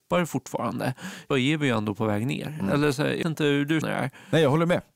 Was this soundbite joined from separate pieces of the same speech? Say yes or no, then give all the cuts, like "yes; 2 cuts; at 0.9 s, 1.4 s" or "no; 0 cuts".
yes; 3 cuts; at 1.3 s, 3.2 s, 3.8 s